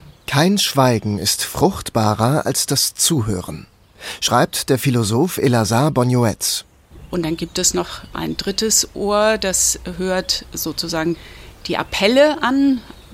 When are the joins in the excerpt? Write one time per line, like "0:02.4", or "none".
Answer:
none